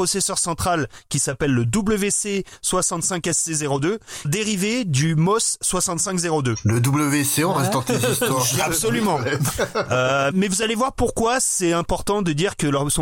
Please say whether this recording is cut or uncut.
cut